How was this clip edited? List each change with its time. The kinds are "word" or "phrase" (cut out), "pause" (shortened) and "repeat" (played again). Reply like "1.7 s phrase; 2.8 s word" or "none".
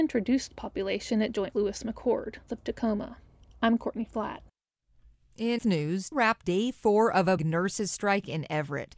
1.5 s word; 2.5 s word; 5.6 s word; 6.1 s word; 6.4 s word; 7.4 s word